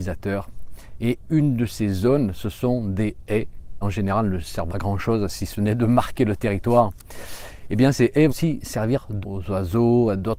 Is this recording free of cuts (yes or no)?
no